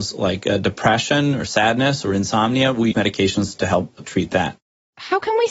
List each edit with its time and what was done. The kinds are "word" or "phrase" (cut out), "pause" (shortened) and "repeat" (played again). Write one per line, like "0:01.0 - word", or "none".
0:02.9 - word

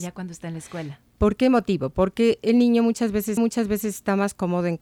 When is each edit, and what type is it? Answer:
0:03.4 - repeat

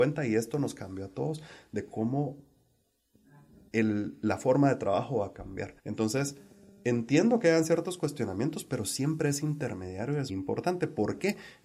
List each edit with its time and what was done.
0:05.8 - pause
0:10.3 - word

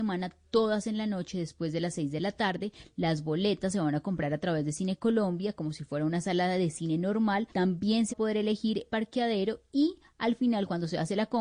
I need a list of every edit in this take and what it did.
0:07.5 - pause
0:08.1 - word
0:08.9 - phrase

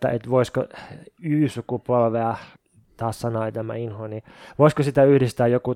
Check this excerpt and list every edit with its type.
0:02.6 - pause

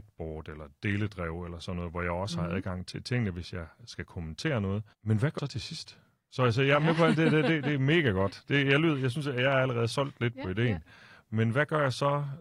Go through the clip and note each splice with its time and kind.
0:02.9 - word
0:04.9 - pause
0:05.4 - word

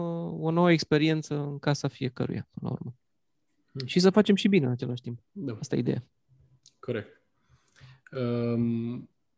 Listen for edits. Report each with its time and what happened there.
0:05.3 - pause

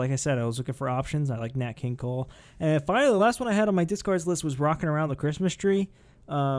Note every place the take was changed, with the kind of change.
none

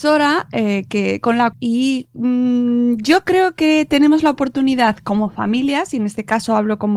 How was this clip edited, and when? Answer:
0:01.5 - phrase

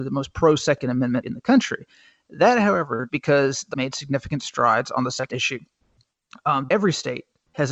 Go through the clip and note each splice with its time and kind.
0:01.2 - word
0:03.1 - word
0:03.7 - word
0:05.3 - word
0:06.7 - word

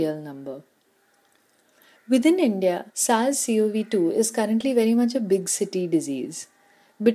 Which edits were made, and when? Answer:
0:02.9 - pause

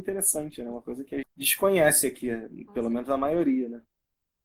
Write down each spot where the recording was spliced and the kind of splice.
0:01.2 - word

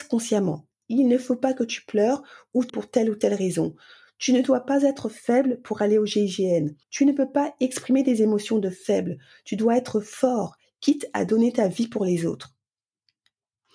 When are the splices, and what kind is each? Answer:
0:02.7 - word
0:06.8 - pause

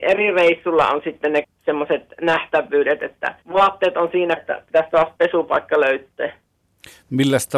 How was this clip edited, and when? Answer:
0:01.4 - word
0:03.4 - pause
0:04.4 - word

